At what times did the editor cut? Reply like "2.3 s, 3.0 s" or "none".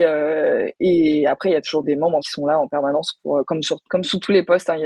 1.8 s, 2.2 s, 3.8 s